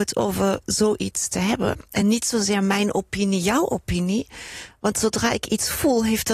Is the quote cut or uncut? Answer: uncut